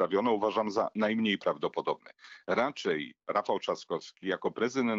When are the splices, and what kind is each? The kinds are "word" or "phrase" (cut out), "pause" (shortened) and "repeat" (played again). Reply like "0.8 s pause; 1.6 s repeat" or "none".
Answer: 3.2 s pause